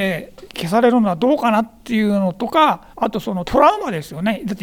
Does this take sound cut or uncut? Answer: cut